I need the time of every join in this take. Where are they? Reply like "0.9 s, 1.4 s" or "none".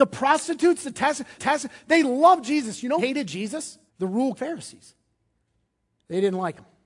1.4 s, 3.0 s, 3.9 s, 4.4 s